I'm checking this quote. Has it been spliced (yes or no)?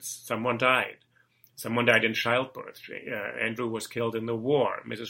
no